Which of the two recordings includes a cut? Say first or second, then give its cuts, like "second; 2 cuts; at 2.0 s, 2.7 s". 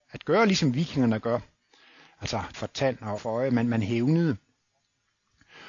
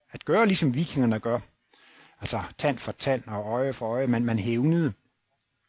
first; 2 cuts; at 2.5 s, 3.2 s